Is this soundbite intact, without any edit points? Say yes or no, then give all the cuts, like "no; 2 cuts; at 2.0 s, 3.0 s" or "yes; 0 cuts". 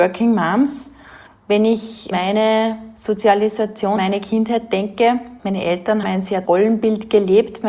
no; 6 cuts; at 1.3 s, 2.1 s, 4.0 s, 5.4 s, 6.0 s, 6.4 s